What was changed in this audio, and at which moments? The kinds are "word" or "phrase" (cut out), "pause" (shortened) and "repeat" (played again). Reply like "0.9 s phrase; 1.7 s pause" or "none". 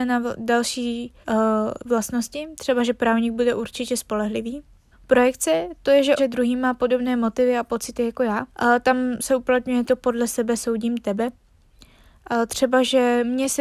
1.2 s pause; 4.9 s pause; 6.2 s word; 8.5 s pause; 9.9 s word